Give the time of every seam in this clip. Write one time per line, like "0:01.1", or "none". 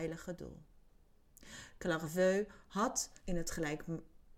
0:03.2